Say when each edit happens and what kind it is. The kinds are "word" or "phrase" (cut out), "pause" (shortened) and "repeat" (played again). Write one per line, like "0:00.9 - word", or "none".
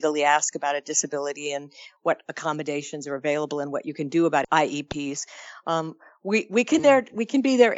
none

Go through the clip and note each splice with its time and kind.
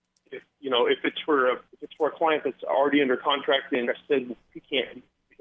0:01.7 - pause
0:03.8 - word

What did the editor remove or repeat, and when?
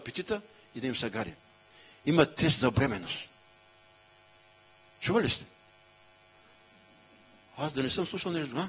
none

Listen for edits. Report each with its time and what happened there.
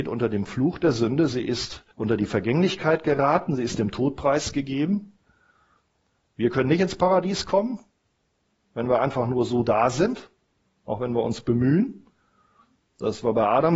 0:01.9 - pause

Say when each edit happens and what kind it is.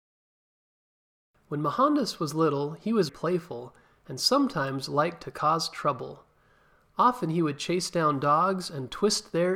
0:03.1 - word

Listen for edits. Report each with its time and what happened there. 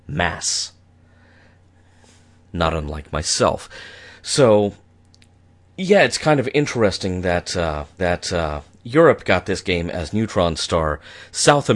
0:08.0 - repeat

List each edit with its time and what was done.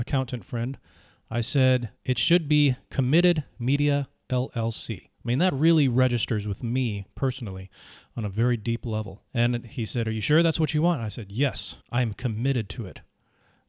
0:02.0 - pause
0:05.1 - pause
0:09.3 - pause
0:11.8 - pause

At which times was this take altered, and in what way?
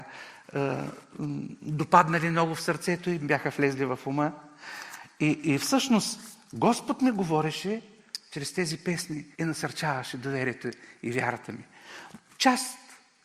0:09.3 - pause

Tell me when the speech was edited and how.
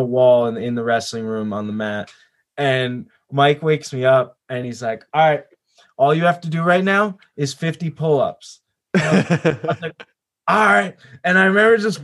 none

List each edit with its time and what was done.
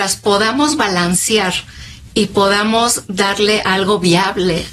none

